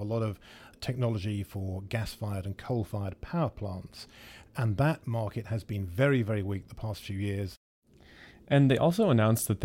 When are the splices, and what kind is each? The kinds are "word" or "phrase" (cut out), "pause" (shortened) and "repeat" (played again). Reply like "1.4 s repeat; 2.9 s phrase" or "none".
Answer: none